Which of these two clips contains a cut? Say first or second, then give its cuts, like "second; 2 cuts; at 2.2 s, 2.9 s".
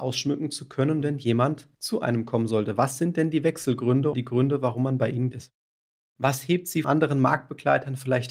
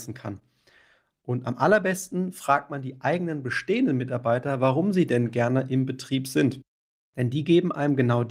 first; 5 cuts; at 1.0 s, 1.7 s, 4.1 s, 5.3 s, 6.8 s